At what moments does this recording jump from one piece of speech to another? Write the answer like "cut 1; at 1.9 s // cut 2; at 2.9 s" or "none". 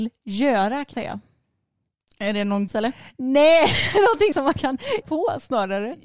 cut 1; at 0.9 s // cut 2; at 2.7 s // cut 3; at 4.3 s // cut 4; at 5.0 s